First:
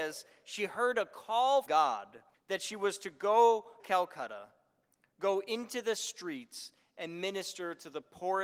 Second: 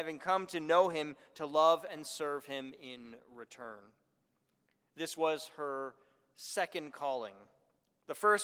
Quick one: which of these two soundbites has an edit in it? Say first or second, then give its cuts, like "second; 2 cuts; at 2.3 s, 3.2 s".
first; 3 cuts; at 1.7 s, 2.3 s, 3.8 s